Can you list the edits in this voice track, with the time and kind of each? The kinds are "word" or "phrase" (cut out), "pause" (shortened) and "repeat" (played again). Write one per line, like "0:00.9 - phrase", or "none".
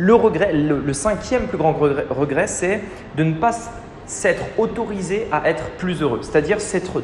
none